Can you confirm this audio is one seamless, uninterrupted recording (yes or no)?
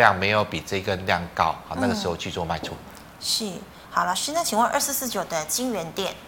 yes